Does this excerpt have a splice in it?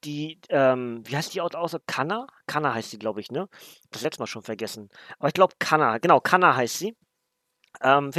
no; 0 cuts

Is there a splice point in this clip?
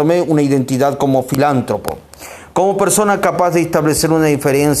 no; 0 cuts

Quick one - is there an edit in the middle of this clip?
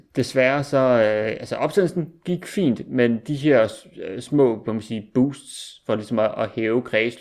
no; 0 cuts

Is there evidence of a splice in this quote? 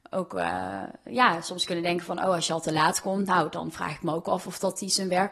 no; 0 cuts

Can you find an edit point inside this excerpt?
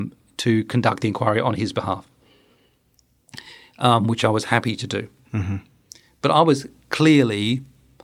no; 0 cuts

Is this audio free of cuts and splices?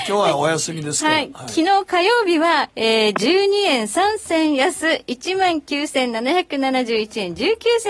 no; 1 cut; at 2.7 s

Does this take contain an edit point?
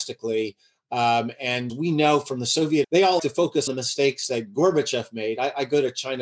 yes; 4 cuts; at 1.7 s, 2.8 s, 3.2 s, 3.7 s

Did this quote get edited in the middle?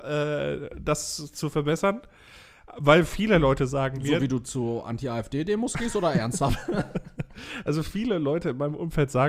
no; 0 cuts

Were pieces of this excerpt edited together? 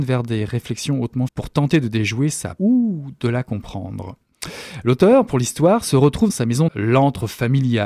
yes; 4 cuts; at 1.3 s, 2.6 s, 6.3 s, 6.7 s

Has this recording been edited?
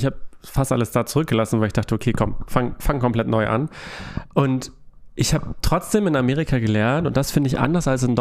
no; 0 cuts

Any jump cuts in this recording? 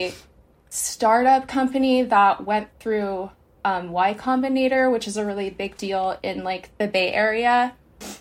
no; 0 cuts

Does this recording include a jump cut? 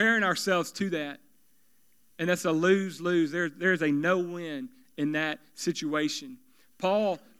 no; 0 cuts

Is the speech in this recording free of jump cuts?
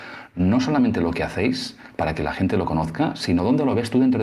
yes; 0 cuts

